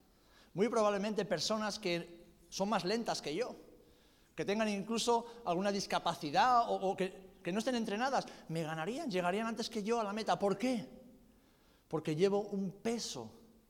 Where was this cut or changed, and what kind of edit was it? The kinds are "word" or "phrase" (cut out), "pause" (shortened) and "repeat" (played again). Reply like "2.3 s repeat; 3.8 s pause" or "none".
none